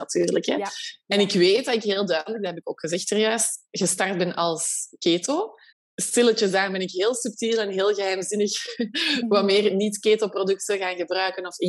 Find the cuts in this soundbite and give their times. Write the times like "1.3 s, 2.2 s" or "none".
5.7 s

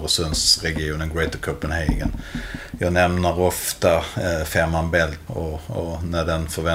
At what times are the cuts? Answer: 5.3 s

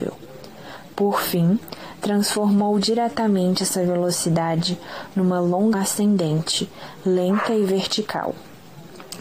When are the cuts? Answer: 5.7 s

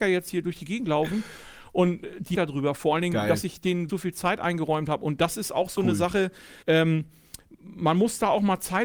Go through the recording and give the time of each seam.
2.3 s, 3.9 s, 6.6 s

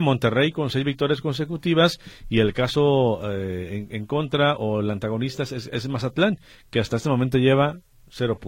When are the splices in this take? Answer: none

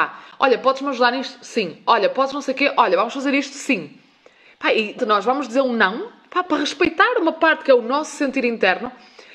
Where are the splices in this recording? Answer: 5.0 s

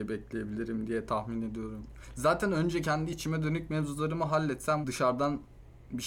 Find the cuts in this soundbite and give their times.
4.8 s

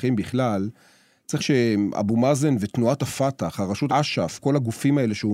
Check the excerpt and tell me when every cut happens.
1.4 s, 3.9 s

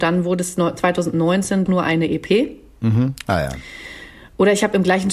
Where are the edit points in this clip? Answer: 1.7 s

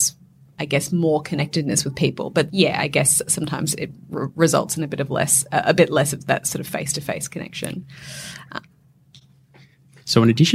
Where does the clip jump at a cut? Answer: 2.5 s

